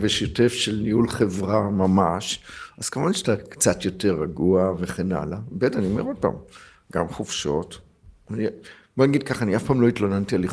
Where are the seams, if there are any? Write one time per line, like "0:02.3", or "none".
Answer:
none